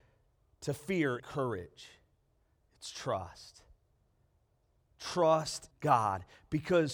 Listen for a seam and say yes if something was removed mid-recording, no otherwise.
yes